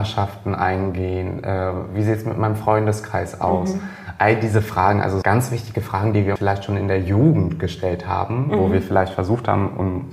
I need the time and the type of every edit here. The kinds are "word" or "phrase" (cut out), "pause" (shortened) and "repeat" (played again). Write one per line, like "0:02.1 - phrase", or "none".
0:05.2 - word
0:06.4 - phrase

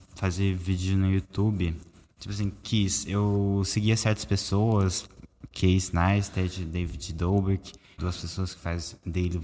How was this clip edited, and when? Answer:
0:08.0 - phrase

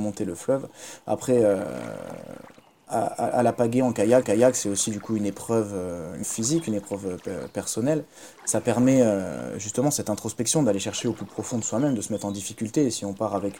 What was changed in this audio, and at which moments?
0:04.2 - repeat
0:06.2 - word

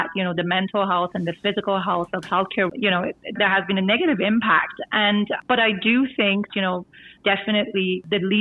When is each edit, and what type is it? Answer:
0:02.7 - word
0:03.4 - word
0:06.5 - word

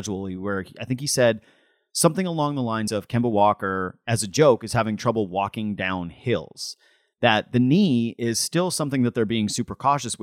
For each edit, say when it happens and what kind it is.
none

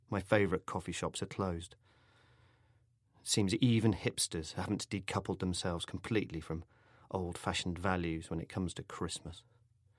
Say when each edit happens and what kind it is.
none

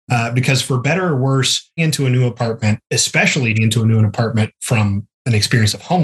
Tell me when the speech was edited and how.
0:01.8 - word
0:03.5 - word

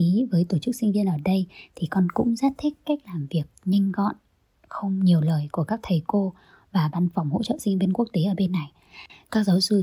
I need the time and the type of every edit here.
none

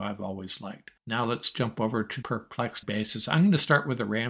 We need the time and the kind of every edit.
0:01.0 - pause
0:02.2 - word
0:02.8 - word

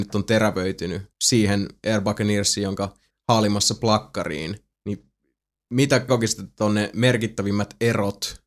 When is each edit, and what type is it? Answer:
0:01.1 - pause
0:03.1 - phrase
0:04.7 - pause
0:06.1 - word

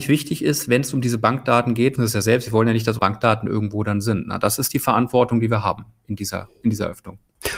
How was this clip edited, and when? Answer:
0:02.0 - phrase
0:03.0 - word

